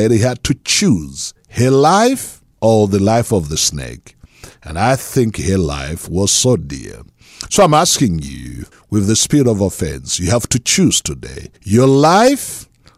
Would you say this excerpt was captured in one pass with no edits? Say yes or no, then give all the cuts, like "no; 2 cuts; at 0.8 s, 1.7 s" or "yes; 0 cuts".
no; 3 cuts; at 2.5 s, 8.7 s, 11.6 s